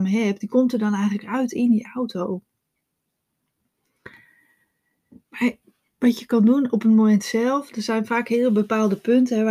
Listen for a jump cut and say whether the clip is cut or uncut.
uncut